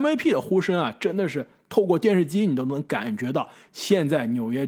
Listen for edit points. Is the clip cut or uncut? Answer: uncut